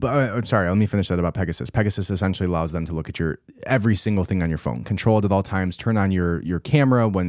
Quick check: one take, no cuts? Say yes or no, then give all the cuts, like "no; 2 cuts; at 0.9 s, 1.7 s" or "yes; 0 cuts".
yes; 0 cuts